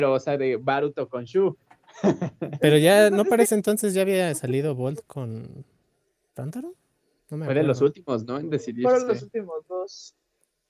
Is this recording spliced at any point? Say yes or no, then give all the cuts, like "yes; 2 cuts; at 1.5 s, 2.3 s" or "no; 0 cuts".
no; 0 cuts